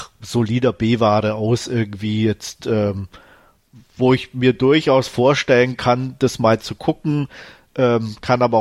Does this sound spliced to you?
no; 0 cuts

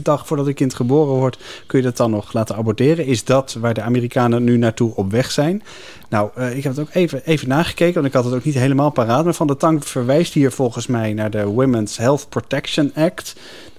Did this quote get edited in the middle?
no; 0 cuts

